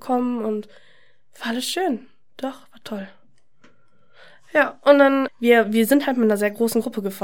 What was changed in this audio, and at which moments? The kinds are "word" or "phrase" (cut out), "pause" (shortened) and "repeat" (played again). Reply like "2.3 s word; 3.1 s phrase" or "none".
5.3 s word